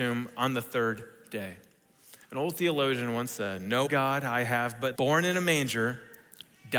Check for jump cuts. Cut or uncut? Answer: cut